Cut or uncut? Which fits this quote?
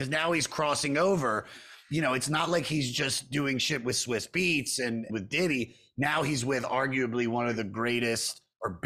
cut